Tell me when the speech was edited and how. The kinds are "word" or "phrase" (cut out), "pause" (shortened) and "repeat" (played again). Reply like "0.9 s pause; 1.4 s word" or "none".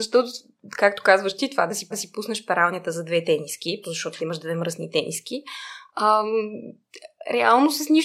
1.9 s repeat; 3.8 s word; 4.2 s word